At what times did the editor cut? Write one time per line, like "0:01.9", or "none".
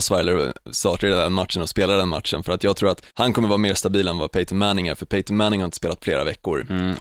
0:03.1
0:06.0

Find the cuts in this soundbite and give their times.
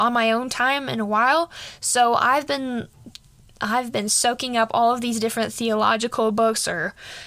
none

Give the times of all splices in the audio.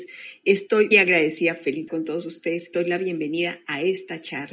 0:00.9
0:01.9
0:02.7

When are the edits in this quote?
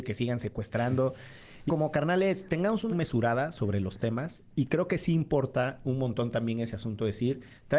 0:01.7
0:02.9
0:05.8

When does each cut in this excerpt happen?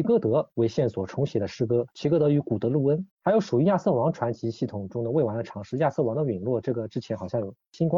0:03.1

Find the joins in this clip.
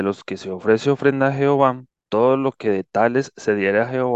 0:01.9

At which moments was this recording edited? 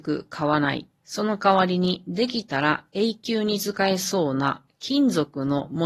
0:01.0

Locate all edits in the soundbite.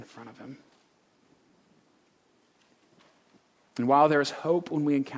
none

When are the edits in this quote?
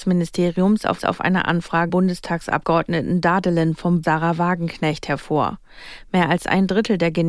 0:01.0
0:01.9
0:04.0

